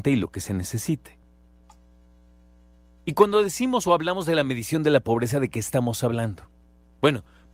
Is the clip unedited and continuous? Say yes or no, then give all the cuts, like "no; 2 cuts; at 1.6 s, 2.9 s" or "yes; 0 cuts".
yes; 0 cuts